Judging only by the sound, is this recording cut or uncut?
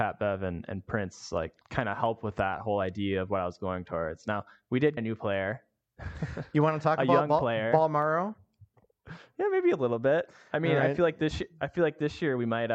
cut